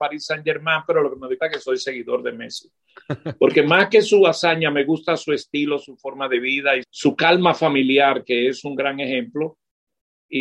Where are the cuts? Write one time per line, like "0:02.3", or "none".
0:01.4
0:06.8